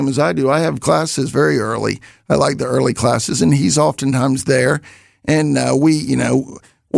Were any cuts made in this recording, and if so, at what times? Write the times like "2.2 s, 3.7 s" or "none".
none